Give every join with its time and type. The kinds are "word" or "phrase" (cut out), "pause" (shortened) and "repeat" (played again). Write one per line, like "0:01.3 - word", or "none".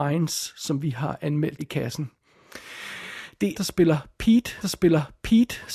0:01.6 - word
0:03.5 - phrase
0:04.6 - repeat